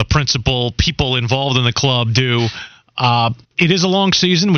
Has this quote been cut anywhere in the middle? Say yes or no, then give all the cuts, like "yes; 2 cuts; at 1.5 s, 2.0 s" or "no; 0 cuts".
yes; 1 cut; at 3.4 s